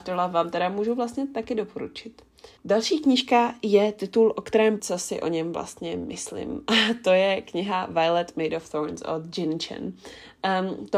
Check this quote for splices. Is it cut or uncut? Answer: cut